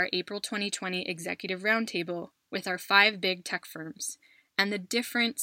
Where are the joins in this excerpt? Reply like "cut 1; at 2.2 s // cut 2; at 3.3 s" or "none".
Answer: none